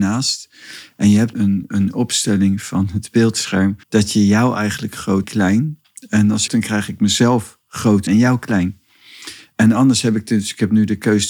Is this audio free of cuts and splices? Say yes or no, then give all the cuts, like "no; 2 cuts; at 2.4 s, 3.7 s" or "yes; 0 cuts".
no; 5 cuts; at 1.3 s, 3.8 s, 5.2 s, 6.5 s, 8.1 s